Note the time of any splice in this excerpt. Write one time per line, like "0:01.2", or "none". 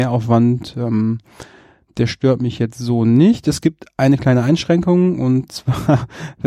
none